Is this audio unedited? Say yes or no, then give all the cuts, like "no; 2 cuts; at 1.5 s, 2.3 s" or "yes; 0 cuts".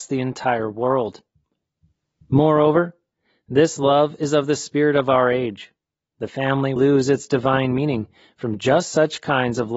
no; 1 cut; at 6.8 s